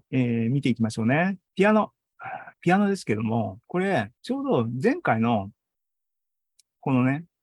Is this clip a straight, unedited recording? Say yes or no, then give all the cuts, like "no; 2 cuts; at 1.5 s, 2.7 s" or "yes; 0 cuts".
no; 4 cuts; at 1.5 s, 2.5 s, 3.6 s, 4.2 s